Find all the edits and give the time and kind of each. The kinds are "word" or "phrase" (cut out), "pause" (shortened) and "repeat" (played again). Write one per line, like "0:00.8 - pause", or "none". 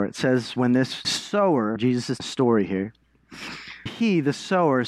0:01.0 - word
0:01.8 - word
0:02.2 - word
0:03.9 - word